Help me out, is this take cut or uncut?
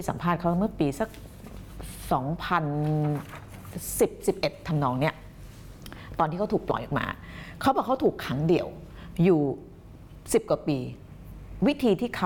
uncut